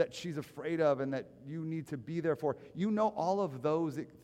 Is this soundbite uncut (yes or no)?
yes